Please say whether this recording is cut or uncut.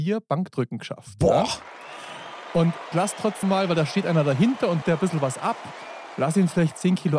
cut